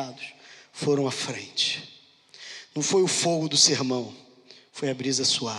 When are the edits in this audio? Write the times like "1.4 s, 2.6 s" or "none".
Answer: none